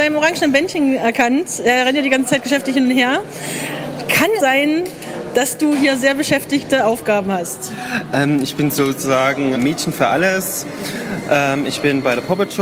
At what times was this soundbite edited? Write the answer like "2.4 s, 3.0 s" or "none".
4.4 s, 9.5 s